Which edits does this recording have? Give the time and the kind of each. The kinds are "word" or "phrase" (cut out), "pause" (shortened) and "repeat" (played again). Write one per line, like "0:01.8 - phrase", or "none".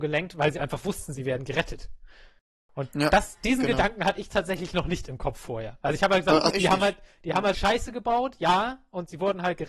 0:06.5 - word
0:07.5 - word